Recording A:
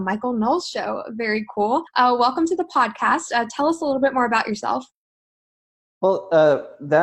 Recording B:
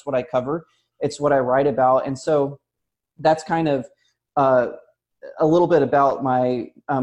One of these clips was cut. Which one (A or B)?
A